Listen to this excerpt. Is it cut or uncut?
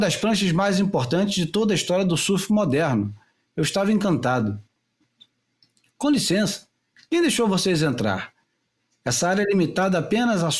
uncut